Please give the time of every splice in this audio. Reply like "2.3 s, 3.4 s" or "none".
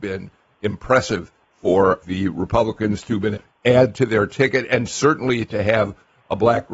2.0 s, 3.3 s